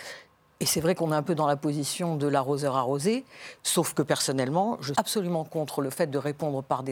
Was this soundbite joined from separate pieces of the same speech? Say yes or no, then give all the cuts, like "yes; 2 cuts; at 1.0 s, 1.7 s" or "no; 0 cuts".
yes; 1 cut; at 4.9 s